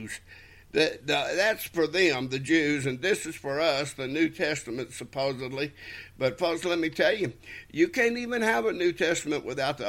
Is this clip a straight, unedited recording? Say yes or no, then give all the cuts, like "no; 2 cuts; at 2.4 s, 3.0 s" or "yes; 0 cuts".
yes; 0 cuts